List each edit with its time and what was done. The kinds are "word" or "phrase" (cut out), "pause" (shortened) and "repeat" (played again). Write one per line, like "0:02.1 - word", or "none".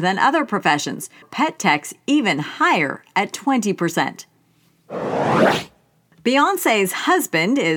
0:01.2 - phrase